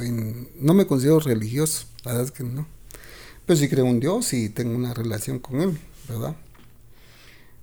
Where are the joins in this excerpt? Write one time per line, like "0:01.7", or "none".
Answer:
none